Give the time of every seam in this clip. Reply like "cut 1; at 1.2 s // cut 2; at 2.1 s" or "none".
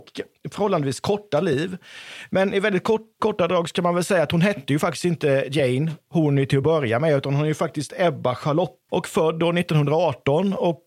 cut 1; at 3.2 s // cut 2; at 7.9 s // cut 3; at 8.9 s

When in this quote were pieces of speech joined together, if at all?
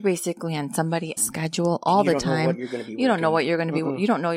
cut 1; at 1.2 s

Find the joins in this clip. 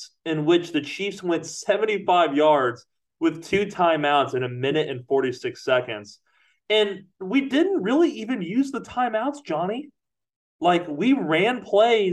none

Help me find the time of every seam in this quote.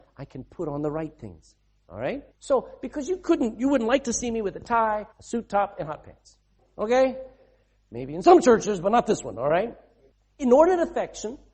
cut 1; at 2.3 s // cut 2; at 5.1 s // cut 3; at 6.6 s // cut 4; at 10.1 s

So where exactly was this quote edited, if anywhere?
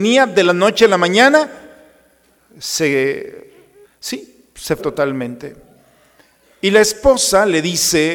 cut 1; at 3.8 s // cut 2; at 4.8 s

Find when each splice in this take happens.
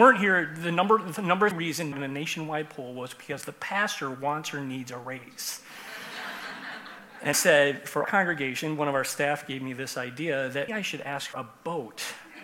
cut 1; at 1.5 s // cut 2; at 1.9 s // cut 3; at 7.3 s // cut 4; at 8.0 s // cut 5; at 10.7 s // cut 6; at 11.3 s

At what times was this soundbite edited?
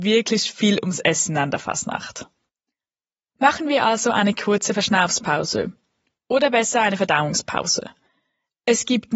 none

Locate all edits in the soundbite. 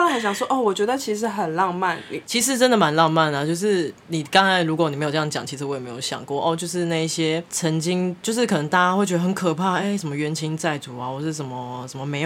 none

